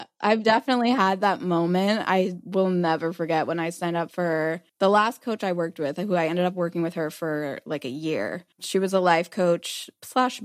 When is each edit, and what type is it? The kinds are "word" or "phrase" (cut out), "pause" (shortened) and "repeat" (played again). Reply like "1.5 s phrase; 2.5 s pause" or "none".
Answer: 4.7 s pause; 8.5 s pause